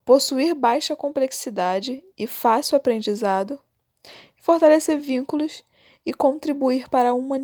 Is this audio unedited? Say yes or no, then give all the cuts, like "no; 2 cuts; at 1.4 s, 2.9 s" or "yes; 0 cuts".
yes; 0 cuts